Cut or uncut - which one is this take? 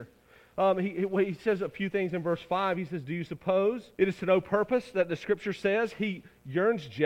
cut